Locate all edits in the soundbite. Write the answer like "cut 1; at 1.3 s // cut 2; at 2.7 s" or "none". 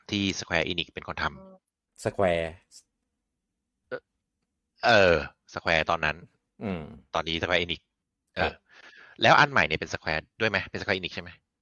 none